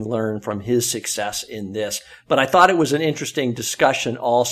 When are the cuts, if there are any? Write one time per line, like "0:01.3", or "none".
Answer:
none